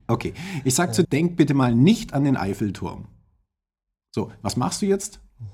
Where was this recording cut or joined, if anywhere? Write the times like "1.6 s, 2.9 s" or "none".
1.0 s